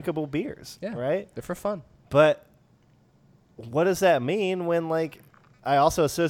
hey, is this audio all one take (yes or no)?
yes